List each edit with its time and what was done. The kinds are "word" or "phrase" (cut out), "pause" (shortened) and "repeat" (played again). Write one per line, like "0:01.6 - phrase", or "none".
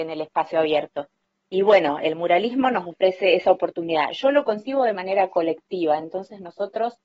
none

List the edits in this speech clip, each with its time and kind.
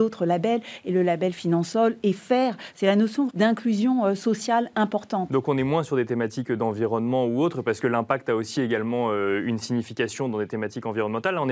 0:03.3 - word

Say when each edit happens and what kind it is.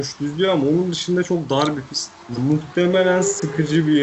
none

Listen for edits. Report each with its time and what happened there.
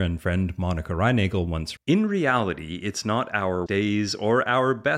0:01.8 - word
0:03.7 - word

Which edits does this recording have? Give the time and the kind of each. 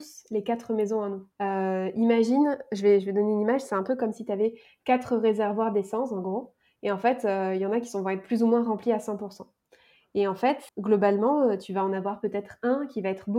0:01.3 - pause
0:10.7 - pause

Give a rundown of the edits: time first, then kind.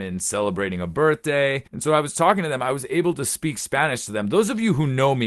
0:01.7 - pause

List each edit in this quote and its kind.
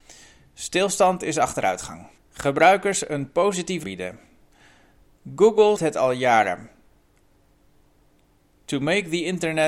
0:02.2 - pause
0:03.8 - word
0:05.8 - word

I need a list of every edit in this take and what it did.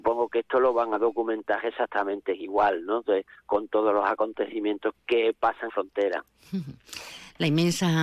0:04.9 - word
0:05.7 - phrase

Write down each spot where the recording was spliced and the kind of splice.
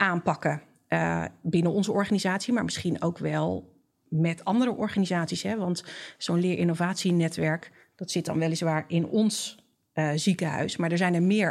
none

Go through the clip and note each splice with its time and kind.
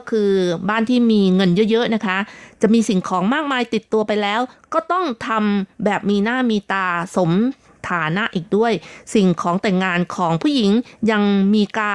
none

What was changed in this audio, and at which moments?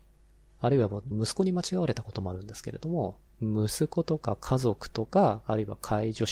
0:01.1 - phrase
0:03.3 - pause

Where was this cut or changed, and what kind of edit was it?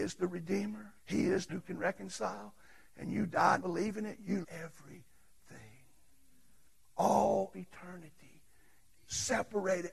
0:01.0 - pause
0:01.5 - word
0:03.6 - word
0:04.4 - word
0:07.5 - word

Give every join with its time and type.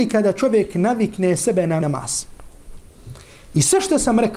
0:01.8 - word

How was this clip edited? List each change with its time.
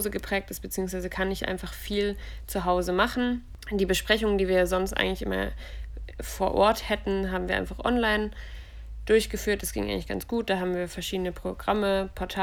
none

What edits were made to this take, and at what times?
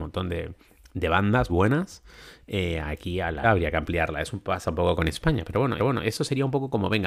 0:01.5 - word
0:03.4 - word
0:05.0 - word
0:05.8 - repeat

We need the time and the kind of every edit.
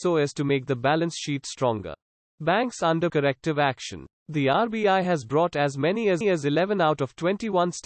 0:02.1 - pause
0:03.1 - word
0:04.2 - pause
0:06.2 - repeat

